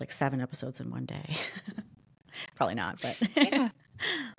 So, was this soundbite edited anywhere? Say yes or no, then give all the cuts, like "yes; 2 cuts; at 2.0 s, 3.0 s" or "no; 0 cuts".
no; 0 cuts